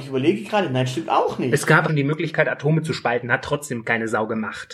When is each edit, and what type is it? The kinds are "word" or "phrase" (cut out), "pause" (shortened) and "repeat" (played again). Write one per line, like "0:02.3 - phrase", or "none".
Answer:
0:01.9 - phrase